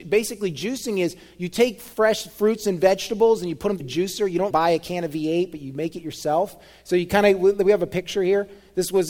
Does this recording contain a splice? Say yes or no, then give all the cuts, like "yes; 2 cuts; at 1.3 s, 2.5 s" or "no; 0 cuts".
yes; 2 cuts; at 3.8 s, 4.5 s